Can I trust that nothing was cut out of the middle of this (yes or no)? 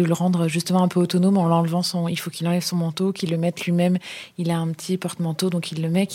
no